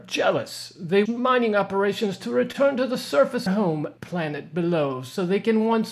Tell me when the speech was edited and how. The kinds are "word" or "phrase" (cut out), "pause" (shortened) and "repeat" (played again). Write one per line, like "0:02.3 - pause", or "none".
0:01.1 - word
0:03.5 - phrase
0:04.0 - pause